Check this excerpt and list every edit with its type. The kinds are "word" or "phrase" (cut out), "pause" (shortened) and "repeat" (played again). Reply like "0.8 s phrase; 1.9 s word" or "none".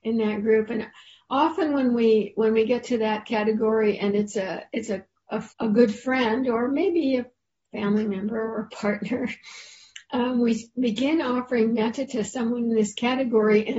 5.5 s pause